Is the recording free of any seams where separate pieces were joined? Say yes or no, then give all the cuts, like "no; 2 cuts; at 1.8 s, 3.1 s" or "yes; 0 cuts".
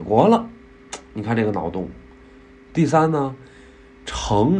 yes; 0 cuts